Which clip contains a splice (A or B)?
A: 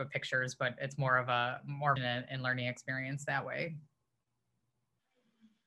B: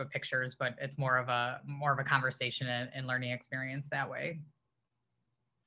A